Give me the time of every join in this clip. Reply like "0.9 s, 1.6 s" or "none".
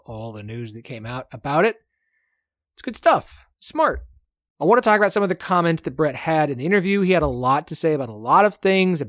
3.5 s